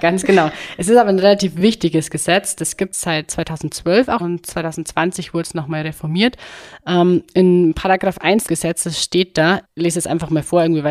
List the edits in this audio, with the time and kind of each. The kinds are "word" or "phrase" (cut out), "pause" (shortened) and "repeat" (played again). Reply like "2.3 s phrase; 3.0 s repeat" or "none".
2.9 s word; 4.2 s word; 8.5 s word; 9.6 s word

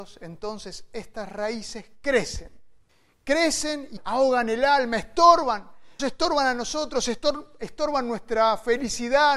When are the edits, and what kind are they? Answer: 2.9 s pause; 4.0 s word; 6.0 s word

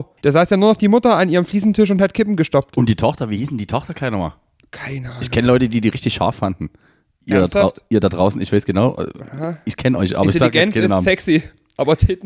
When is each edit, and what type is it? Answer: none

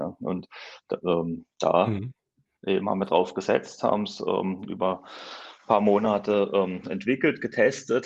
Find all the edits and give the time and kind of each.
none

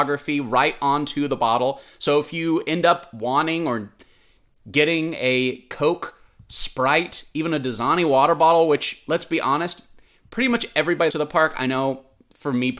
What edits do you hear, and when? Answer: 11.1 s phrase

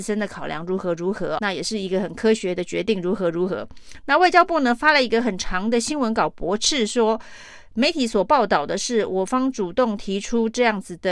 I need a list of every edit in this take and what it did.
1.4 s word

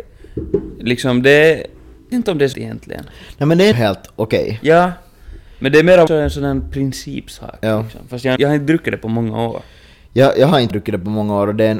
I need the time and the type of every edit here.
2.1 s word; 2.5 s word; 3.7 s word; 6.1 s word; 8.4 s word; 10.7 s word

